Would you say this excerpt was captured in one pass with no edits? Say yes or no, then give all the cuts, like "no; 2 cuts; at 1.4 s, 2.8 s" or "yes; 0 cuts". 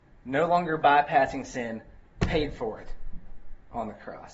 yes; 0 cuts